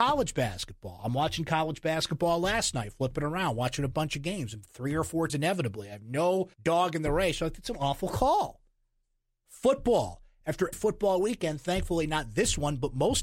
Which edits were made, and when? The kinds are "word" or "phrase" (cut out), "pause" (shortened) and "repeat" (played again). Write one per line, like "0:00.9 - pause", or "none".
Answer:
0:05.3 - word
0:06.5 - pause
0:10.7 - word